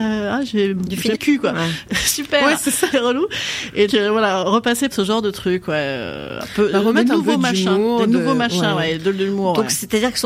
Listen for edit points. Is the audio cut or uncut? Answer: cut